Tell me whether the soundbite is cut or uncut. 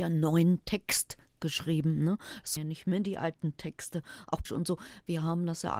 cut